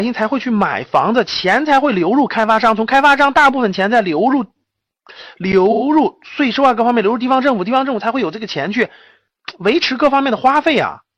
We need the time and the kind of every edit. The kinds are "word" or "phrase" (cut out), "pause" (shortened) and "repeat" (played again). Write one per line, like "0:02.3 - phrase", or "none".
none